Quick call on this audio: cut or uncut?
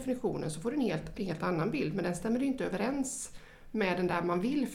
cut